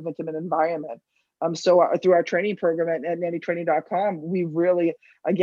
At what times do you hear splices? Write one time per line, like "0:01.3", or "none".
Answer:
none

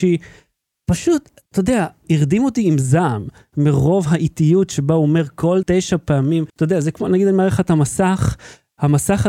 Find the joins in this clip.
0:02.0
0:05.6
0:06.5

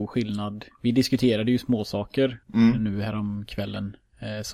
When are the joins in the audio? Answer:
0:02.4

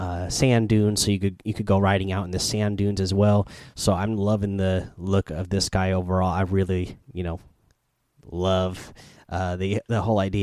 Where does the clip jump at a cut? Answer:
0:07.0

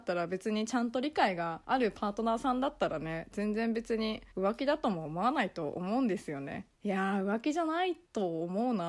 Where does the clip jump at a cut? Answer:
0:01.6
0:04.3
0:06.7

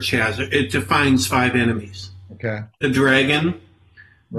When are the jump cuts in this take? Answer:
0:02.7

